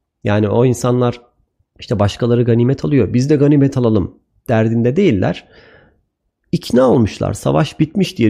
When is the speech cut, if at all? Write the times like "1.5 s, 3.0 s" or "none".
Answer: none